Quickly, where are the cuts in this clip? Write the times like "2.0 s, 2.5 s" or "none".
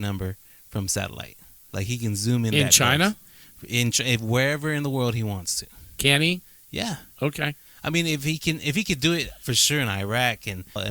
none